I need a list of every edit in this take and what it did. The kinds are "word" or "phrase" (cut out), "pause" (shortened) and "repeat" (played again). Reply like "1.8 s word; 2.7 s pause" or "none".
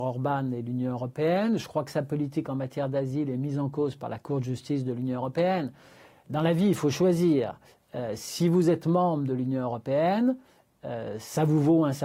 none